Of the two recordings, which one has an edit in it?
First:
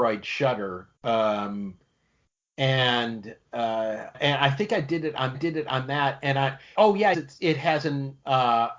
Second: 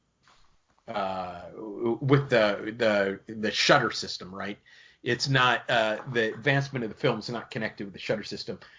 first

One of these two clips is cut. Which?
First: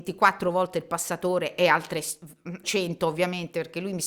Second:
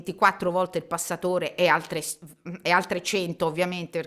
first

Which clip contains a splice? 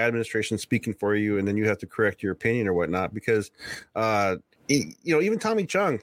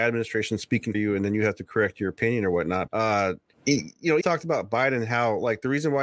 second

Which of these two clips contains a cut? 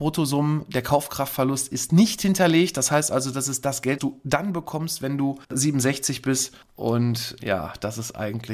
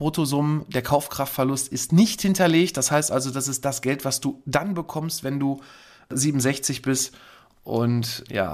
first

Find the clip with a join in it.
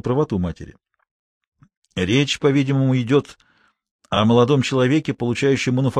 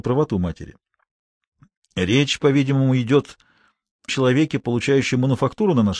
second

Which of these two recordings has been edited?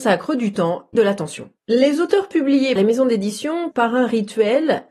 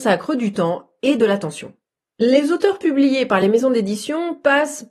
first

